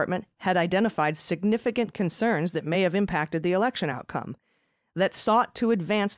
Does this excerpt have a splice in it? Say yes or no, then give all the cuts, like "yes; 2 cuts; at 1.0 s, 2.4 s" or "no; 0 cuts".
no; 0 cuts